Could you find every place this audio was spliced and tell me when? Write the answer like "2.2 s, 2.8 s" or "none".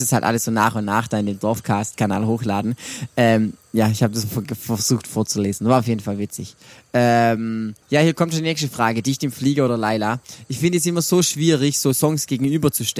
7.8 s